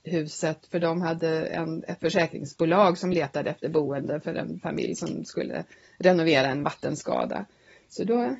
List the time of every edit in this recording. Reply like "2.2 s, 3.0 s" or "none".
none